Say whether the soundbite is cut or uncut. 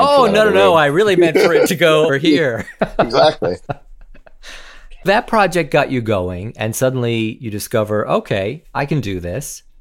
cut